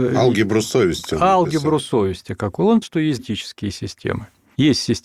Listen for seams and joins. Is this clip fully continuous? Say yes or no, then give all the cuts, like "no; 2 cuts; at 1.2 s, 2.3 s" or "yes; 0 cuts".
no; 2 cuts; at 2.8 s, 3.2 s